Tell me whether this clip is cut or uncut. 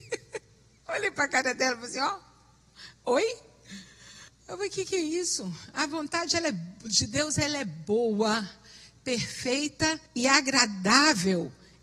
cut